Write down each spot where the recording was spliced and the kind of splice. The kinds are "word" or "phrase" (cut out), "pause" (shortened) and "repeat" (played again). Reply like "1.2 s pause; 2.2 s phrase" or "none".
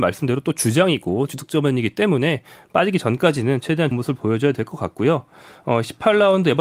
1.3 s word; 3.9 s word